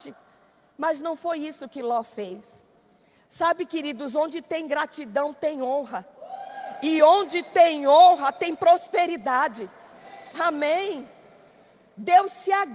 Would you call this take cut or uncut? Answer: uncut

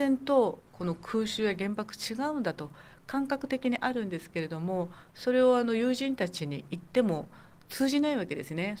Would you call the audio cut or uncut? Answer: uncut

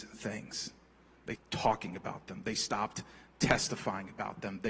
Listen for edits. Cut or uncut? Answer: cut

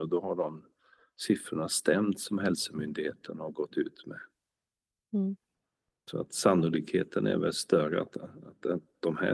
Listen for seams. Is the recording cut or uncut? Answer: uncut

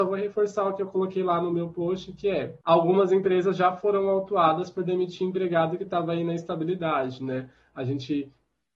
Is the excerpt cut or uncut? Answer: cut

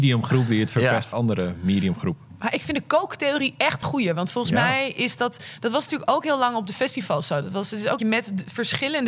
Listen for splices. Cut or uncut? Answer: cut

